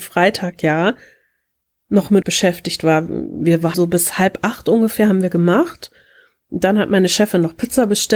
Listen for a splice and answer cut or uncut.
cut